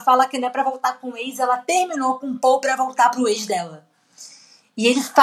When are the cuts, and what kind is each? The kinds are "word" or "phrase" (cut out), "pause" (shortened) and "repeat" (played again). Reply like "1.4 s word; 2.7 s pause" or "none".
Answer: none